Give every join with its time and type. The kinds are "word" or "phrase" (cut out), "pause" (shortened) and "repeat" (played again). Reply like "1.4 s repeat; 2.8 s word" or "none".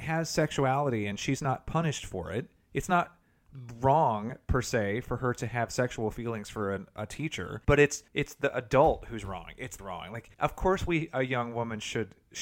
7.6 s pause; 8.1 s pause; 9.8 s phrase; 10.3 s pause